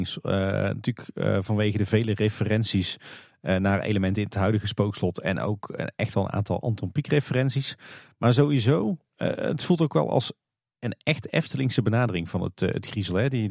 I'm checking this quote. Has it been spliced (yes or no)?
no